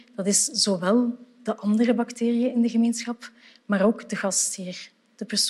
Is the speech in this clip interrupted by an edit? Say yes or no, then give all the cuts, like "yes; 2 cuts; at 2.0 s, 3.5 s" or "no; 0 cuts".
no; 0 cuts